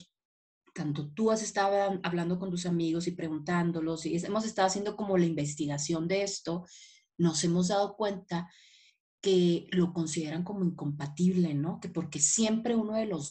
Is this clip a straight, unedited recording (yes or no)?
yes